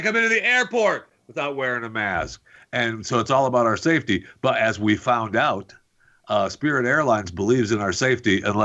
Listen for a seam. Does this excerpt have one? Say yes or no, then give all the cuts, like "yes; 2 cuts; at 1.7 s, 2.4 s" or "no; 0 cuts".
no; 0 cuts